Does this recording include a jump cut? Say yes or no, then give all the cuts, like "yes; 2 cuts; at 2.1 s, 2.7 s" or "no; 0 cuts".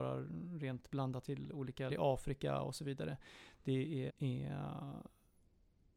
yes; 3 cuts; at 1.2 s, 1.9 s, 4.1 s